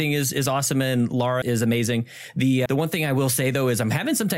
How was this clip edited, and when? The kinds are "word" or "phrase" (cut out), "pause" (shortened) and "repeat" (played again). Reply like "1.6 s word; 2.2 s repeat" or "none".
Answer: 1.4 s word; 2.7 s word